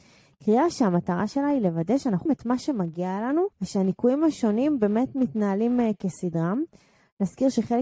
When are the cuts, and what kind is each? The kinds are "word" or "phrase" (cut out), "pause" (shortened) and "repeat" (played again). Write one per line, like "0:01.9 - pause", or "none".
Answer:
0:02.3 - word
0:03.5 - pause